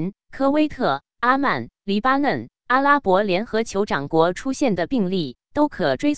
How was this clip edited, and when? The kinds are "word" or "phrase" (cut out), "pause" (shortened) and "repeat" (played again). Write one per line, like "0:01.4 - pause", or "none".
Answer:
none